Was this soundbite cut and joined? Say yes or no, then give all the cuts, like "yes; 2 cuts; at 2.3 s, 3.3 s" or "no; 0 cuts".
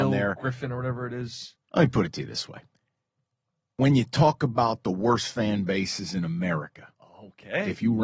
yes; 1 cut; at 1.6 s